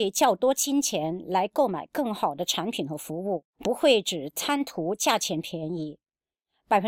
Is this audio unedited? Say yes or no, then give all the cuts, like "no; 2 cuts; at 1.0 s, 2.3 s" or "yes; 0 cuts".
no; 1 cut; at 3.5 s